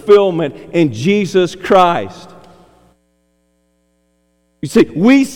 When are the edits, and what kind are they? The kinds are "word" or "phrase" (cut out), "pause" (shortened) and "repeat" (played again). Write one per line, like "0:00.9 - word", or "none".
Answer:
none